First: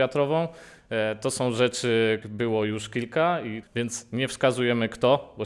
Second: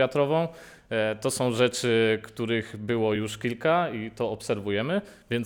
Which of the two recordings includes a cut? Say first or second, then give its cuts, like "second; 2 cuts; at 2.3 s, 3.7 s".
first; 2 cuts; at 2.2 s, 3.6 s